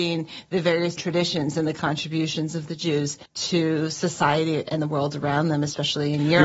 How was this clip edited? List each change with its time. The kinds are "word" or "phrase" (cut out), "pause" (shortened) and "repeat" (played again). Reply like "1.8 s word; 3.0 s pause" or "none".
1.0 s word; 3.3 s pause